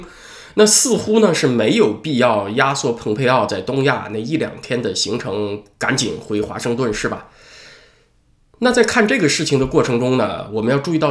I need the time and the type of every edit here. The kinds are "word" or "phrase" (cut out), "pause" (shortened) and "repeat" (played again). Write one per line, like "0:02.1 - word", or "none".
none